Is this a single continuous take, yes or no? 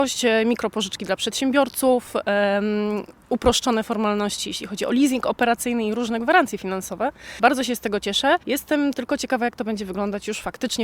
no